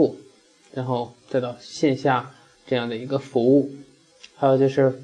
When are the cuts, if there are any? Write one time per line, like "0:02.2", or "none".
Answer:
0:02.5